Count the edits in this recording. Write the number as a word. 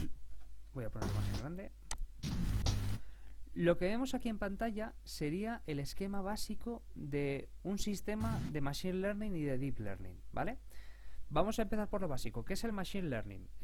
zero